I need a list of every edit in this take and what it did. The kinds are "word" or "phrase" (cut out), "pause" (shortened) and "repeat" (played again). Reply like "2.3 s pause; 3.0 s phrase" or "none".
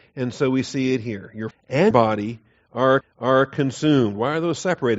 1.5 s word; 1.9 s word; 3.0 s repeat

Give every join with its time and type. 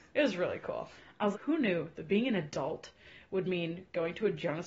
1.3 s word

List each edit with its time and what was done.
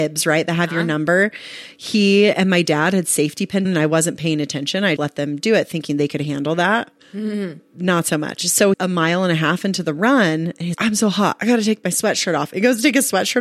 3.6 s phrase; 5.0 s word; 7.0 s pause; 8.7 s phrase; 10.7 s word

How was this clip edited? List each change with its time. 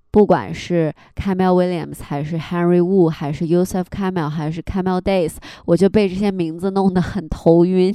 none

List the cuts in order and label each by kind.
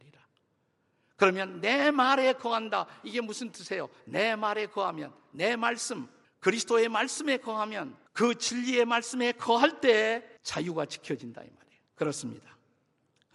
6.2 s pause; 8.1 s pause; 10.4 s pause; 11.9 s pause

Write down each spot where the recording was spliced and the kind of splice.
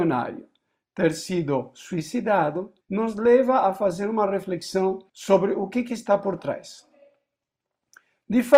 2.8 s pause; 5.1 s pause

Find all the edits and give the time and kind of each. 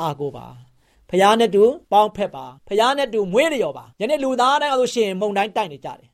1.8 s pause; 2.6 s pause; 3.9 s pause

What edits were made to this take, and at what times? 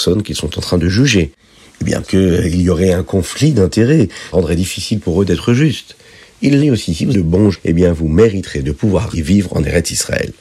2.0 s word; 4.3 s word; 6.6 s word; 7.1 s word; 7.5 s word; 9.1 s word

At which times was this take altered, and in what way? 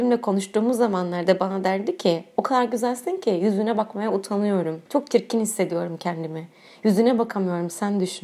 4.9 s pause

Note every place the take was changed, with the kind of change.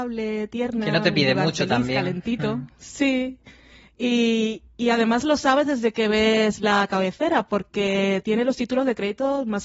none

